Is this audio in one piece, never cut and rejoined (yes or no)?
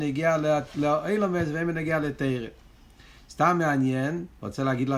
yes